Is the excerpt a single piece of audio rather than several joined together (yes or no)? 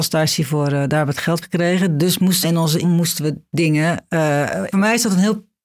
no